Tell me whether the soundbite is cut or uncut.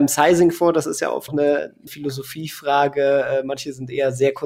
cut